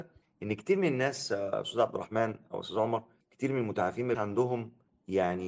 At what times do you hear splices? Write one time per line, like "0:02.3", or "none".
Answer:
0:04.1